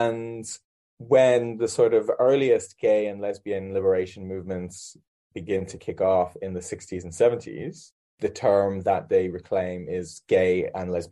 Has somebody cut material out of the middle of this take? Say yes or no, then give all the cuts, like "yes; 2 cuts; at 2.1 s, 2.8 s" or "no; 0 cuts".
no; 0 cuts